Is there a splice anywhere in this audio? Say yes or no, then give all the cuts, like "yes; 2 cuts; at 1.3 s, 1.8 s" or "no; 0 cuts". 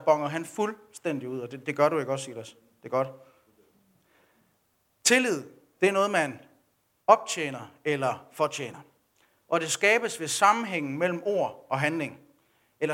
no; 0 cuts